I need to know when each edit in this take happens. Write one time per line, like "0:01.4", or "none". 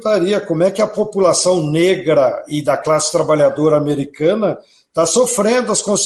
none